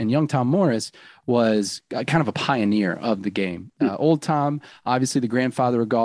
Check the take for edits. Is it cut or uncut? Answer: uncut